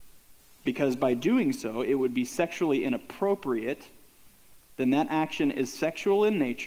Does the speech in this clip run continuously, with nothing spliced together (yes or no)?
yes